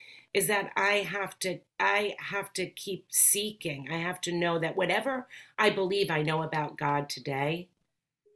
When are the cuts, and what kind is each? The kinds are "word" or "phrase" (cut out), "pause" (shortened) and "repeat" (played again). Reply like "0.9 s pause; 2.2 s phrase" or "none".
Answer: 1.7 s pause